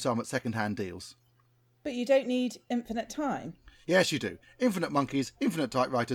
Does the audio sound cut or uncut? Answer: uncut